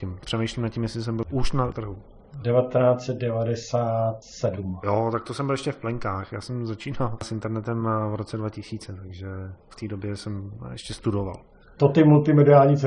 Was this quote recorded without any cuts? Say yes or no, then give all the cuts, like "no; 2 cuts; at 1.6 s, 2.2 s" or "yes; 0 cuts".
yes; 0 cuts